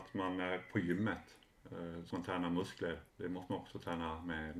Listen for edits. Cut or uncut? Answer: cut